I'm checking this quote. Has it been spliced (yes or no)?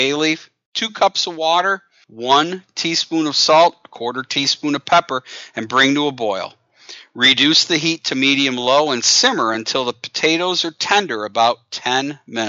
no